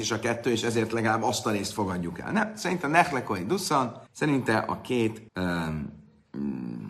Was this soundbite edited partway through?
yes; 2 cuts; at 4.1 s, 5.3 s

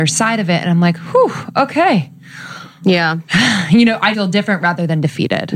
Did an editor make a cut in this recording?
yes; 1 cut; at 4.1 s

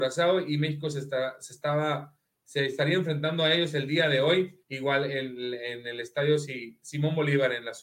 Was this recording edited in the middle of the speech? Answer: yes; 1 cut; at 4.6 s

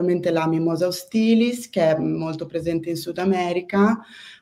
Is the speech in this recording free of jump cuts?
yes; 0 cuts

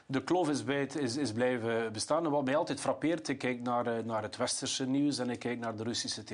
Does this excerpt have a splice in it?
no; 0 cuts

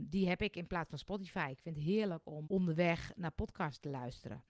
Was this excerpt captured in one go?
no; 1 cut; at 2.4 s

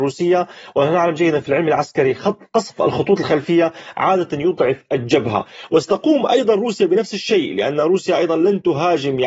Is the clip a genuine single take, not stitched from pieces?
yes; 0 cuts

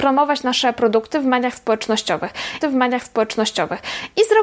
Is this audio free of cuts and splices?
no; 1 cut; at 2.6 s

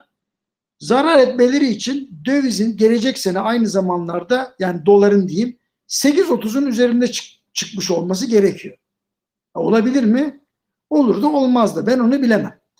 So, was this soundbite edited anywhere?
no; 0 cuts

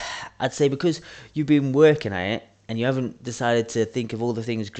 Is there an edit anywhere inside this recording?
no; 0 cuts

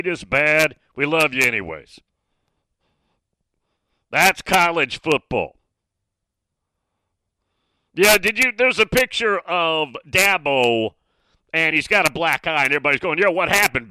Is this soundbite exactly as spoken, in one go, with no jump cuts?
yes; 0 cuts

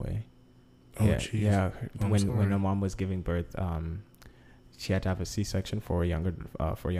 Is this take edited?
no; 0 cuts

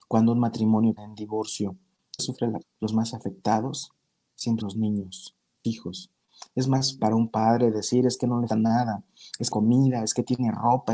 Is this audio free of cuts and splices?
no; 8 cuts; at 1.0 s, 2.2 s, 2.6 s, 4.6 s, 5.6 s, 7.0 s, 8.5 s, 9.5 s

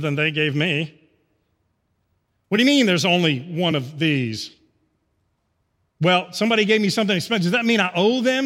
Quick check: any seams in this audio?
no; 0 cuts

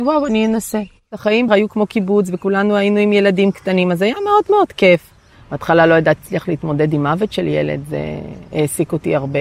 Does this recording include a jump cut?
yes; 2 cuts; at 1.5 s, 6.2 s

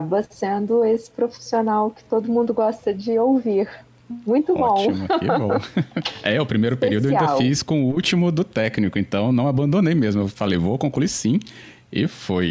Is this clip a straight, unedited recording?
yes; 0 cuts

